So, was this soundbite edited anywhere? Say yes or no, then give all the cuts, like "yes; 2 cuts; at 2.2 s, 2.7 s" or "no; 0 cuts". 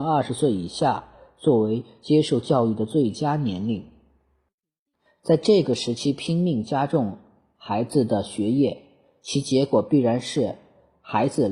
no; 0 cuts